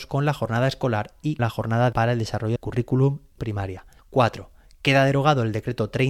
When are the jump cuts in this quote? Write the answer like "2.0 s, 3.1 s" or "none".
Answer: 1.4 s, 1.9 s, 2.6 s, 3.4 s